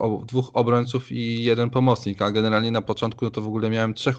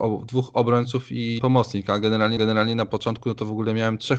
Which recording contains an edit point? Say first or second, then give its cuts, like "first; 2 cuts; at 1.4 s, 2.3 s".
second; 2 cuts; at 1.4 s, 2.4 s